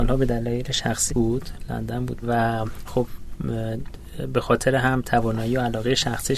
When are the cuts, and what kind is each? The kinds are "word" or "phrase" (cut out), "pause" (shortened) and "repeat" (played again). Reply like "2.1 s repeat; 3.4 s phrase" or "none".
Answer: 1.1 s word; 2.2 s word; 2.9 s word